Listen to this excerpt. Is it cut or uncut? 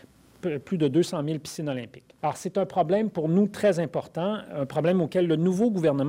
cut